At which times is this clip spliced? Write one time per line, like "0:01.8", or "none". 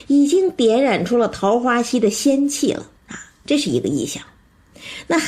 0:03.0